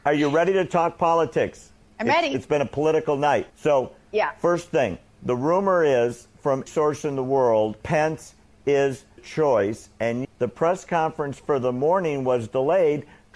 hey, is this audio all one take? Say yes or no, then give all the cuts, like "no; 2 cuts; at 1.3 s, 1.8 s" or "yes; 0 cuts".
no; 6 cuts; at 1.8 s, 3.5 s, 6.7 s, 7.8 s, 9.2 s, 10.2 s